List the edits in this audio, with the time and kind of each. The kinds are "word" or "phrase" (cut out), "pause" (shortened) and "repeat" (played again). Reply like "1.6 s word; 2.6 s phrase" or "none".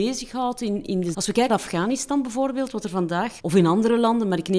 1.1 s word; 1.5 s word; 3.4 s word